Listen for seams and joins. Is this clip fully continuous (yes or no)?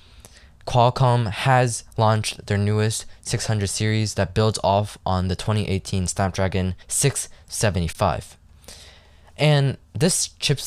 no